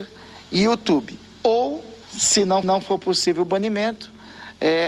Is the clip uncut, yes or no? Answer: no